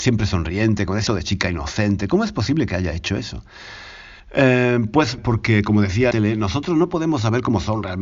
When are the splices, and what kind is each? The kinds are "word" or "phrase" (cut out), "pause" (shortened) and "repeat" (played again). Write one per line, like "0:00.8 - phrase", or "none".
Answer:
0:01.1 - word
0:04.2 - pause
0:05.2 - word
0:06.1 - phrase